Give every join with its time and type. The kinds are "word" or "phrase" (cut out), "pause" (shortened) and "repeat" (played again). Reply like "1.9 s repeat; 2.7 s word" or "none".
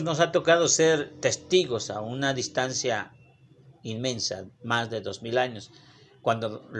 none